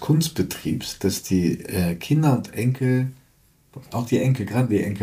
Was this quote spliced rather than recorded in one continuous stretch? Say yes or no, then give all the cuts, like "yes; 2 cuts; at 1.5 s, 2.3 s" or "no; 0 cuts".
no; 0 cuts